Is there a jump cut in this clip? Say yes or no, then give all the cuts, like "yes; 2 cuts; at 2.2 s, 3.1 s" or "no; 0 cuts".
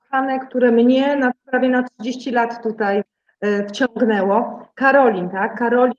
no; 0 cuts